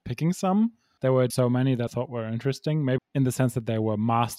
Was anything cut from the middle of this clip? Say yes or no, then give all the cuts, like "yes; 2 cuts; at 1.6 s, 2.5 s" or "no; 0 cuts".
yes; 4 cuts; at 1.0 s, 1.3 s, 1.9 s, 3.0 s